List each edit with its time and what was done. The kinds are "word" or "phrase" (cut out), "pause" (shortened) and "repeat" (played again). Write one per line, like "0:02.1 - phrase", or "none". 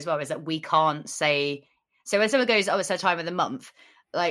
none